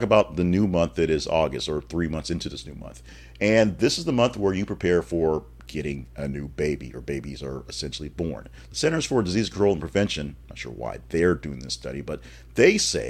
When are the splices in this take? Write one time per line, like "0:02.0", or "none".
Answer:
none